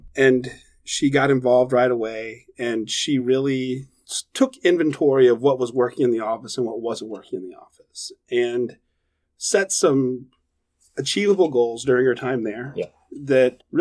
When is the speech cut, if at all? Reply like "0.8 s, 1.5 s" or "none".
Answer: none